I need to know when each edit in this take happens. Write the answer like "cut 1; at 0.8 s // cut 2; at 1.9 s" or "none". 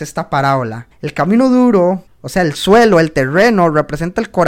cut 1; at 0.9 s // cut 2; at 2.1 s